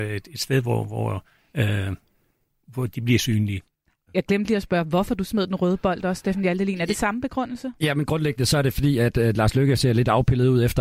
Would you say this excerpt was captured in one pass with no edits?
yes; 0 cuts

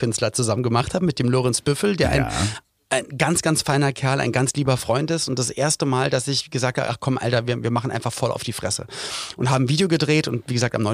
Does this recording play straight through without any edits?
yes; 0 cuts

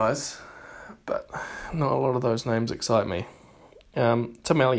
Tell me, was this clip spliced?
no; 0 cuts

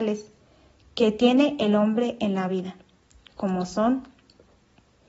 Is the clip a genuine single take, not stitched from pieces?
yes; 0 cuts

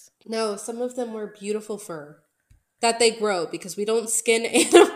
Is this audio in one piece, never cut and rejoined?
yes; 0 cuts

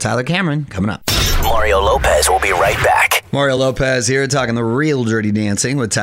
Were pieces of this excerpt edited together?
no; 0 cuts

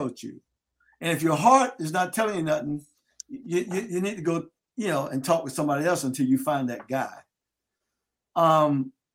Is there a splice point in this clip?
no; 0 cuts

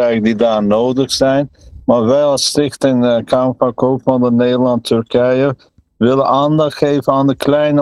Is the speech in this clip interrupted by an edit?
no; 0 cuts

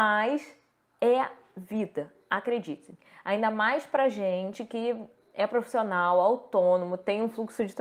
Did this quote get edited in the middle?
no; 0 cuts

